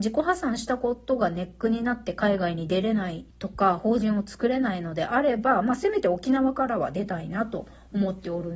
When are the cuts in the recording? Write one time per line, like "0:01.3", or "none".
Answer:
0:03.3